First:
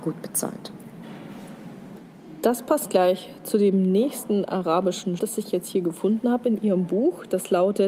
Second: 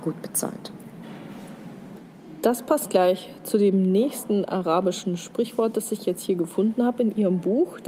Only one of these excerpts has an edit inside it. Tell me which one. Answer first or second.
first